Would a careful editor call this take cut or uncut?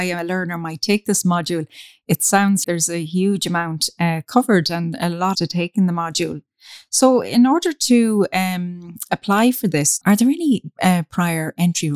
cut